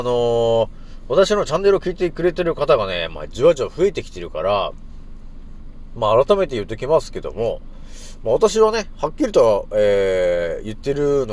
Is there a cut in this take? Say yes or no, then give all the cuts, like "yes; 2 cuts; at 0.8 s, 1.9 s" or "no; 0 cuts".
no; 0 cuts